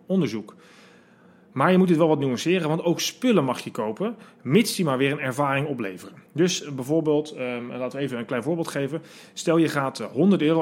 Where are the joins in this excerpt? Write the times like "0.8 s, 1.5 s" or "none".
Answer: 6.3 s